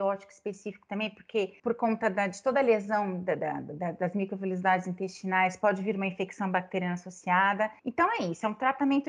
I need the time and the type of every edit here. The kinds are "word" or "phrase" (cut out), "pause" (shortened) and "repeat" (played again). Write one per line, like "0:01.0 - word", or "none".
0:01.6 - pause
0:07.8 - pause